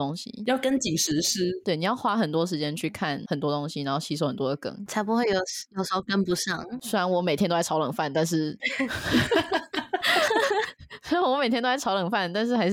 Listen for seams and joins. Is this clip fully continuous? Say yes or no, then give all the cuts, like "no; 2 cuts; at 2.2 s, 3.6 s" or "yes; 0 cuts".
yes; 0 cuts